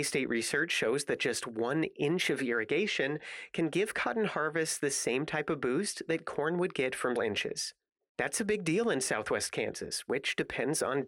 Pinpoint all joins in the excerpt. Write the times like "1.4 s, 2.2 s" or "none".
7.2 s